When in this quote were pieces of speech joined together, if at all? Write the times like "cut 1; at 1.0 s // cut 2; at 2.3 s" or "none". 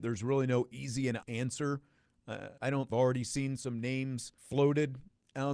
cut 1; at 1.2 s // cut 2; at 2.6 s // cut 3; at 2.9 s // cut 4; at 3.6 s // cut 5; at 4.4 s